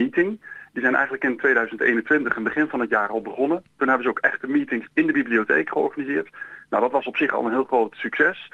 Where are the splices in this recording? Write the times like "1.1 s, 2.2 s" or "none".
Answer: none